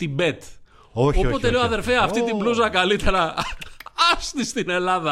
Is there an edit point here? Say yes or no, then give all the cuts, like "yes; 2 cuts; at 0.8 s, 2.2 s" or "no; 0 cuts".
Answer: no; 0 cuts